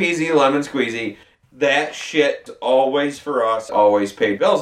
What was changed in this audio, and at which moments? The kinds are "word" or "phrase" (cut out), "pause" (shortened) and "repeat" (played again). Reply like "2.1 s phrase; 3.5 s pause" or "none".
1.4 s pause; 2.5 s word; 3.7 s word